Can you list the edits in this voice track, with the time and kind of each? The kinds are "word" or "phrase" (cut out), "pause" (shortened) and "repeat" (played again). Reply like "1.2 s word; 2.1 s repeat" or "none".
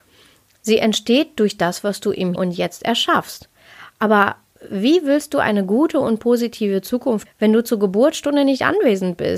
2.4 s word; 7.3 s word